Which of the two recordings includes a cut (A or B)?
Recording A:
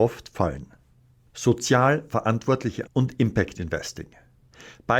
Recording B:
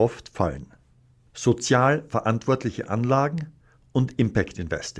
A